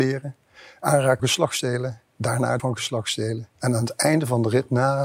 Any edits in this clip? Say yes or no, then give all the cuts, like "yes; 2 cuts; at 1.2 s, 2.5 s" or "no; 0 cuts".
yes; 3 cuts; at 1.2 s, 2.6 s, 3.5 s